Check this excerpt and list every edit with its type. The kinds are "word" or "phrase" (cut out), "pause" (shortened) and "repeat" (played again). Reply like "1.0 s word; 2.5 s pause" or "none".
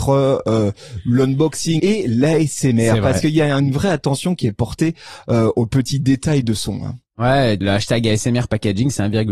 1.8 s word; 7.6 s word